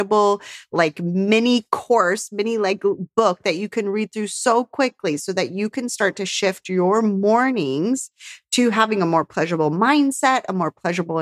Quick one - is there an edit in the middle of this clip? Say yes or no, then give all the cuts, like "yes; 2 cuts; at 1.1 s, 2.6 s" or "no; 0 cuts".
no; 0 cuts